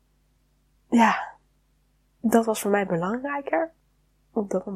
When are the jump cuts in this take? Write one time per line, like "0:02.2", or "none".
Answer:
none